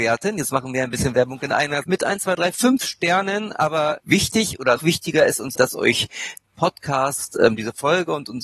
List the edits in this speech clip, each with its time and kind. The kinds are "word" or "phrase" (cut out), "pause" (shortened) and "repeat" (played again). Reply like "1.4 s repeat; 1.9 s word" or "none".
1.8 s word; 2.5 s word; 4.0 s word; 4.8 s word; 5.6 s word; 6.5 s word